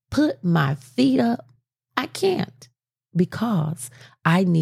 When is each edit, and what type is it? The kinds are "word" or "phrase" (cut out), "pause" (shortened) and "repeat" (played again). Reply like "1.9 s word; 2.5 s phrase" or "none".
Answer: none